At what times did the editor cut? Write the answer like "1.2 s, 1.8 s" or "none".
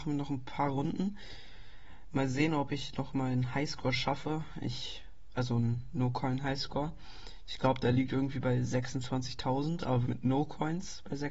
10.0 s